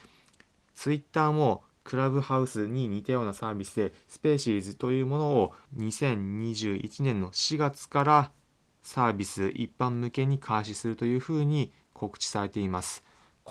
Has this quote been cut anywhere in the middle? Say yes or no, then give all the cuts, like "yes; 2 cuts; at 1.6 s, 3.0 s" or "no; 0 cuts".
yes; 1 cut; at 5.7 s